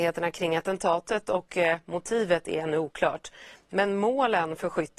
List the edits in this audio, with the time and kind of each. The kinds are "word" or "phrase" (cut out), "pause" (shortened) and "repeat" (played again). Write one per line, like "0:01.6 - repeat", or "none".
none